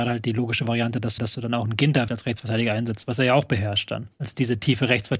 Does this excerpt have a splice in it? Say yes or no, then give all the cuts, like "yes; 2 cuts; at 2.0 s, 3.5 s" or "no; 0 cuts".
yes; 3 cuts; at 1.2 s, 2.1 s, 4.1 s